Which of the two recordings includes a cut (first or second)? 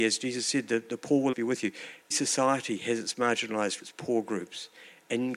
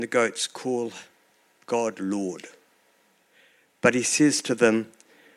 first